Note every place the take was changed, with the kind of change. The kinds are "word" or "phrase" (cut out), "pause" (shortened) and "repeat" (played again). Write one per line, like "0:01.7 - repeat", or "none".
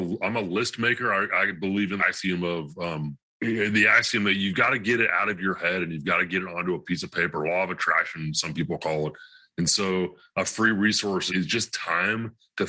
0:02.0 - word
0:03.3 - pause
0:11.3 - word